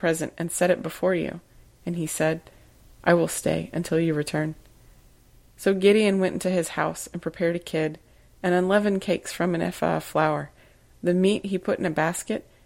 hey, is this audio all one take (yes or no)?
yes